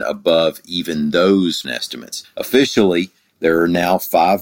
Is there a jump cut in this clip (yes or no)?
yes